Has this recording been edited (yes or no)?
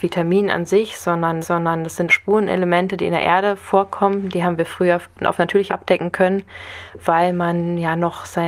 yes